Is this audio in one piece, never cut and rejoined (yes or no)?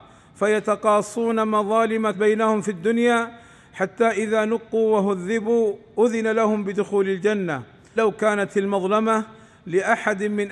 no